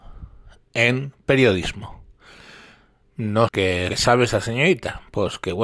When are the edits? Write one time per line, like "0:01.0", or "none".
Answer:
0:03.5
0:03.9